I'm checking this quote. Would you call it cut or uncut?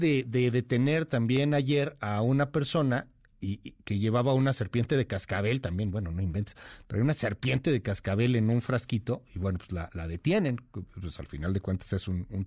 uncut